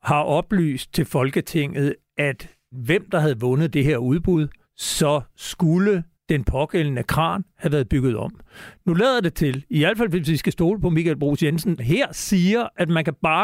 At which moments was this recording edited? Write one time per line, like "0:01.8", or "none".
0:02.7
0:04.6
0:06.1
0:11.8